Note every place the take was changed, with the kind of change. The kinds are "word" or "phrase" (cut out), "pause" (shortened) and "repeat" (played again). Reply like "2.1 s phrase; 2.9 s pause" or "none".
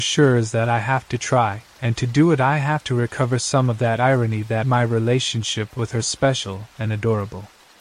1.7 s pause; 4.6 s word; 6.0 s word